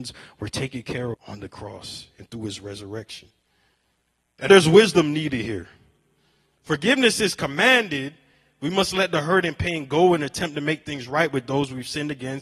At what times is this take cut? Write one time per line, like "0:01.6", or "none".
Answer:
0:01.1
0:04.5